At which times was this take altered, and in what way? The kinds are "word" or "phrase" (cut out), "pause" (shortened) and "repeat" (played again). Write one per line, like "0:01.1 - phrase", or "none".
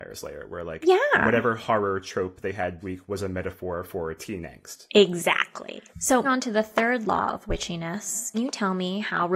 0:02.8 - word
0:06.2 - word
0:08.3 - word